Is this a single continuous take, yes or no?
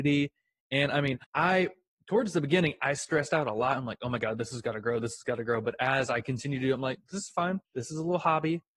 no